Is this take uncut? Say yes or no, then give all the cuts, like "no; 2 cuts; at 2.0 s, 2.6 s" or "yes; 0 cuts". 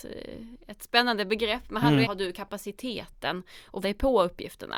no; 2 cuts; at 2.0 s, 3.8 s